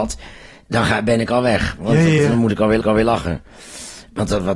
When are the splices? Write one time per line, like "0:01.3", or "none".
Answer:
0:02.2
0:02.8